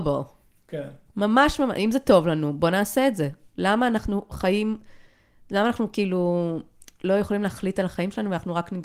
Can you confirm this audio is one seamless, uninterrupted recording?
yes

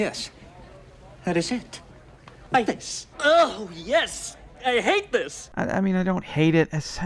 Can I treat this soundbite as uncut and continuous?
no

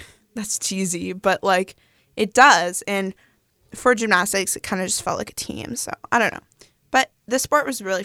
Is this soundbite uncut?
yes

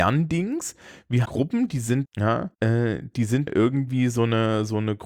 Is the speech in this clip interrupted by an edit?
yes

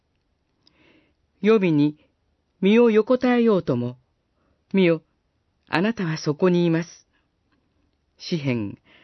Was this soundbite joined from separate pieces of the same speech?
no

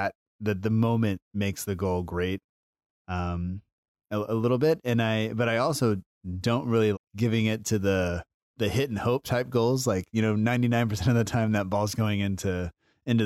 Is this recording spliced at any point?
yes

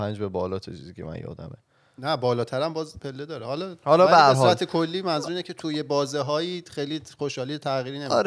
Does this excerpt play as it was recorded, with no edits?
yes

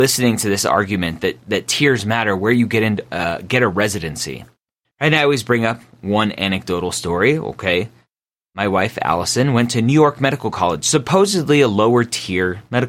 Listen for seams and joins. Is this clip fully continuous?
yes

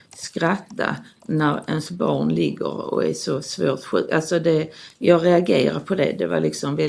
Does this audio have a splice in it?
no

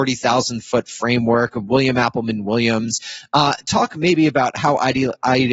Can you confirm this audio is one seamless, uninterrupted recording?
yes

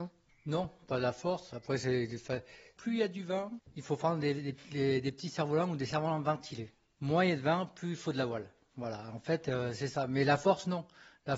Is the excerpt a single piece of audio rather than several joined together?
yes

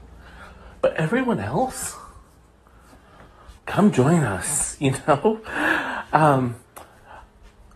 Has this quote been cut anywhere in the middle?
yes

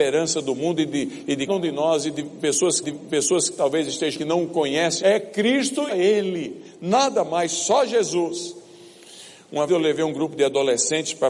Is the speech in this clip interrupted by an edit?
yes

